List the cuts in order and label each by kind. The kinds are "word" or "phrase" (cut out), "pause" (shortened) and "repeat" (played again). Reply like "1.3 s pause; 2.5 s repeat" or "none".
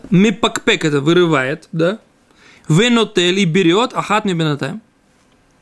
none